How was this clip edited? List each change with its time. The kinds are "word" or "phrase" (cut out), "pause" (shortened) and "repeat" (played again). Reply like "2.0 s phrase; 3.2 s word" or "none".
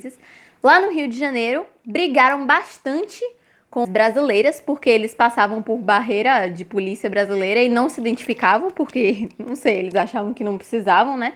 3.8 s word